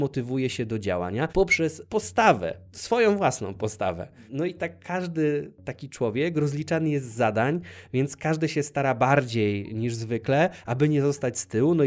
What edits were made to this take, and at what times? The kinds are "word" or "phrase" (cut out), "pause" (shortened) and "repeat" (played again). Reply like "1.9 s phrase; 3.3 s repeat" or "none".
none